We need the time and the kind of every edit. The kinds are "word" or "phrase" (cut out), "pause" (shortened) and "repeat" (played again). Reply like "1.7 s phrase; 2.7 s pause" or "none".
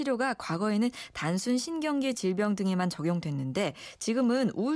none